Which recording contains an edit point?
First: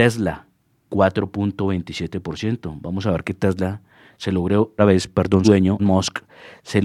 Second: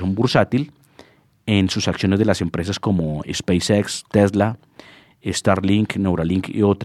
first; 3 cuts; at 4.8 s, 5.4 s, 5.8 s

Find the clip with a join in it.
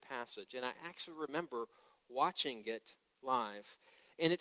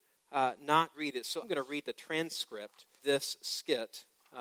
second; 3 cuts; at 0.9 s, 1.4 s, 3.0 s

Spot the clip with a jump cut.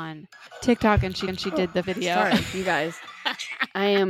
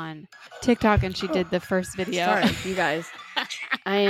first; 2 cuts; at 1.3 s, 1.8 s

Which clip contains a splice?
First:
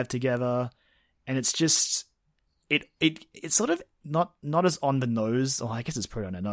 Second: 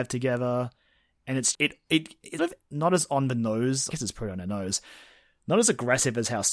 second; 4 cuts; at 1.5 s, 2.4 s, 2.7 s, 3.9 s

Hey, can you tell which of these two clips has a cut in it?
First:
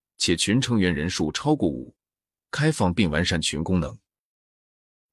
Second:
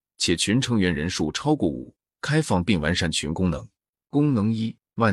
second; 2 cuts; at 2.1 s, 3.9 s

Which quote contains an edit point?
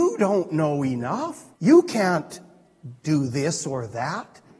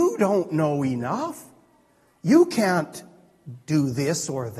first; 1 cut; at 1.5 s

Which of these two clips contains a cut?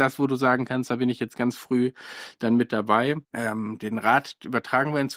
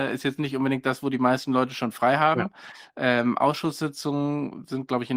first; 1 cut; at 3.2 s

